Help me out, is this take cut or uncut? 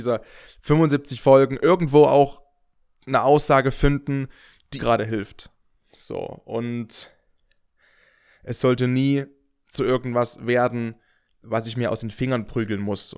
cut